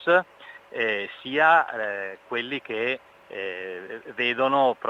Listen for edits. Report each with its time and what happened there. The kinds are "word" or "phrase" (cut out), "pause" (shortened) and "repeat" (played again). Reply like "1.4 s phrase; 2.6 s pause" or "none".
none

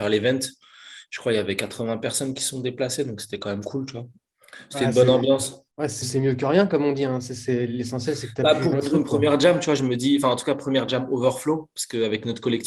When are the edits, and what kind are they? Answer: 5.7 s pause; 6.0 s word; 8.7 s word

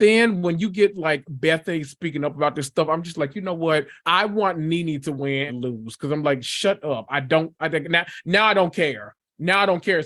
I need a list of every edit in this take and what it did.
4.0 s pause; 5.5 s phrase

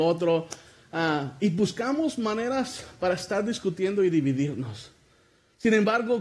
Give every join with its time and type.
none

